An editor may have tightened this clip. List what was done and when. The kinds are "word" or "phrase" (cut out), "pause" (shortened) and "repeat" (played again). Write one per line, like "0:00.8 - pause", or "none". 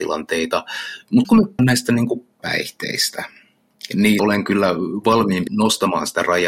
0:01.2 - word
0:01.6 - word
0:02.4 - word
0:04.2 - word
0:05.5 - word

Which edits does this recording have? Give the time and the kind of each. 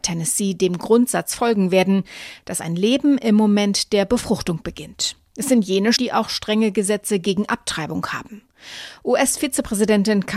0:06.0 - word

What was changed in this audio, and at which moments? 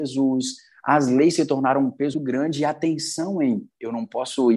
0:02.1 - word

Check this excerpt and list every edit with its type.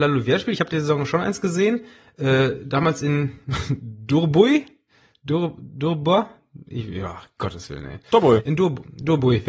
none

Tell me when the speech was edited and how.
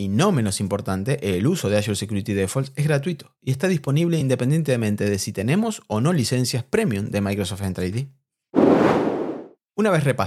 none

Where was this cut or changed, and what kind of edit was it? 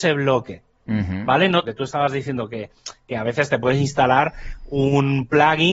0:01.6 - phrase

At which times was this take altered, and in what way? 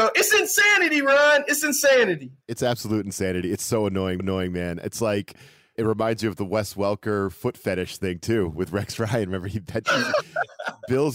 0:02.4 - pause
0:04.2 - repeat
0:05.8 - word

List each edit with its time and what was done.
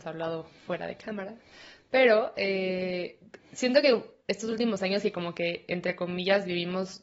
none

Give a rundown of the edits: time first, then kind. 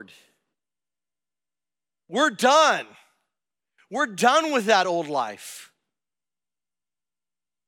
none

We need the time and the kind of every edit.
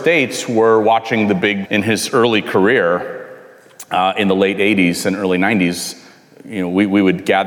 0:01.7 - phrase

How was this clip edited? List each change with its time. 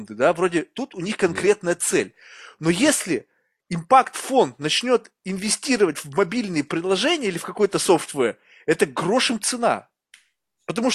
none

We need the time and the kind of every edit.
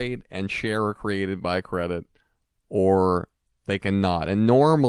none

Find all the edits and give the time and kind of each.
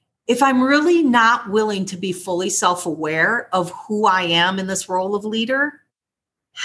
none

